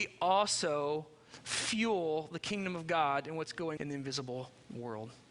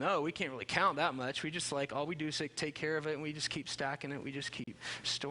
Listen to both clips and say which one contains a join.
first; 1 cut; at 3.8 s

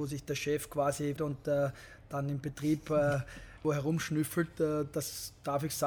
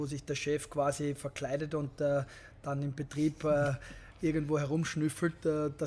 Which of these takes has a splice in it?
first; 2 cuts; at 1.2 s, 3.6 s

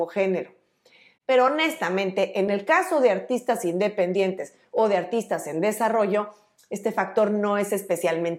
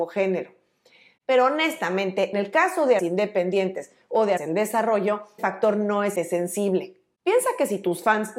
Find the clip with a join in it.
second; 5 cuts; at 2.3 s, 3.0 s, 4.4 s, 5.4 s, 6.2 s

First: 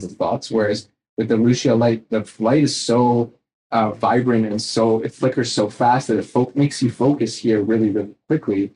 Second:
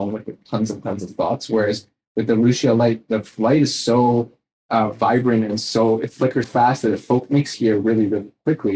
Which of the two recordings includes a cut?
second; 2 cuts; at 6.4 s, 7.5 s

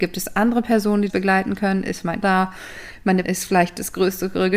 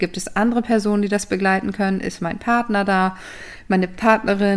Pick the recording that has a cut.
first; 3 cuts; at 1.1 s, 2.2 s, 3.2 s

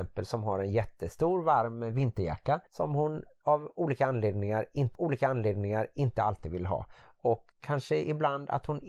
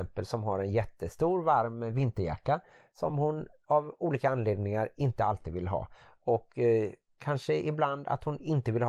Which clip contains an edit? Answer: first; 3 cuts; at 2.7 s, 4.9 s, 7.5 s

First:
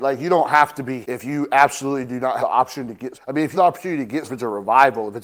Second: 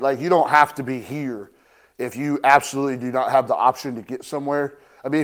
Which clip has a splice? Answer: first; 5 cuts; at 1.0 s, 2.4 s, 3.1 s, 3.5 s, 4.2 s

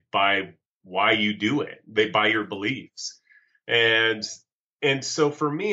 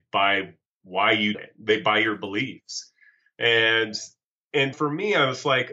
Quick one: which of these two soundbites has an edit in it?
second; 2 cuts; at 1.3 s, 4.7 s

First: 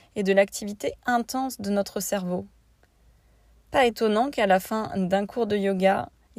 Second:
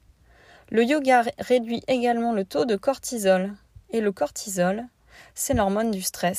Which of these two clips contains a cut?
second; 1 cut; at 3.8 s

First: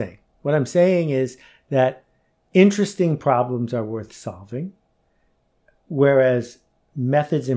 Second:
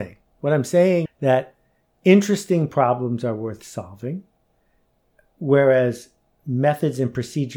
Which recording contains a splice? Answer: second; 1 cut; at 1.1 s

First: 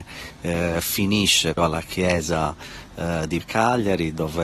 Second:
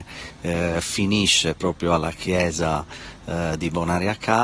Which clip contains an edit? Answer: first; 2 cuts; at 1.6 s, 3.4 s

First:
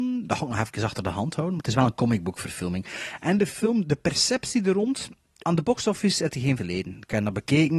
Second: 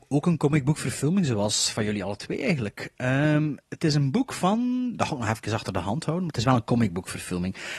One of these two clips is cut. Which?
first; 2 cuts; at 5.4 s, 6.6 s

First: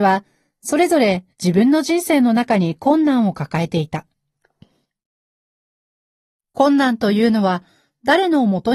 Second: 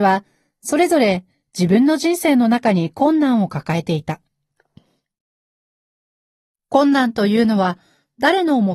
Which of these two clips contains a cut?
first; 1 cut; at 1.3 s

